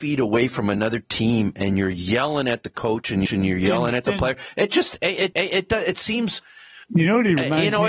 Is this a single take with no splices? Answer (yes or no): no